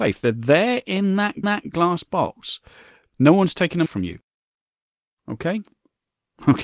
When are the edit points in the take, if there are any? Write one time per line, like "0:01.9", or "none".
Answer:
0:01.4
0:03.9